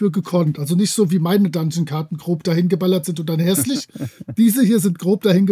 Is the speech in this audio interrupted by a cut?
no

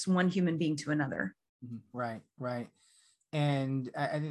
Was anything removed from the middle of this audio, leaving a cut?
no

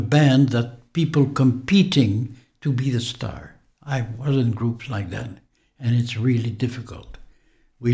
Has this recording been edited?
no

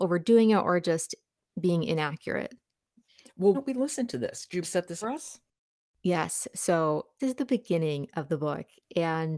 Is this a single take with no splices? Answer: no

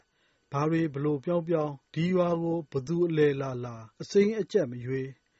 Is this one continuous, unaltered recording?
no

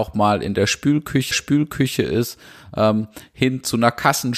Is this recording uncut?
no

